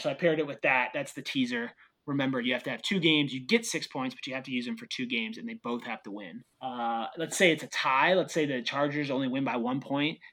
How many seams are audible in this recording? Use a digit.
1